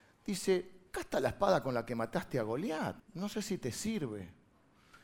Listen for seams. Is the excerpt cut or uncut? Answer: cut